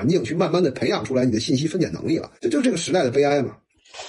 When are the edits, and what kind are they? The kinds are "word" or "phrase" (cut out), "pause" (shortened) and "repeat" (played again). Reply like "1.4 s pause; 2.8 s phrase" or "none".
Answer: 2.4 s pause